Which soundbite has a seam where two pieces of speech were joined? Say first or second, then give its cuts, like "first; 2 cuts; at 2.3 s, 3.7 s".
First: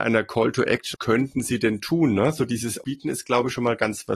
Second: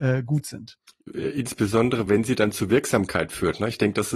first; 2 cuts; at 0.9 s, 2.8 s